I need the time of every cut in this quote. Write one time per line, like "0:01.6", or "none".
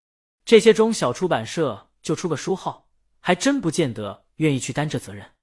none